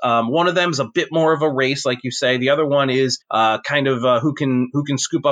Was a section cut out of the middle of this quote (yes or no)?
yes